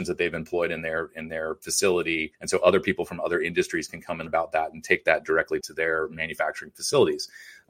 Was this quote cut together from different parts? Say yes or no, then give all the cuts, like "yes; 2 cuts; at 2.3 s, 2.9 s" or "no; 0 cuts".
yes; 3 cuts; at 2.3 s, 4.3 s, 5.6 s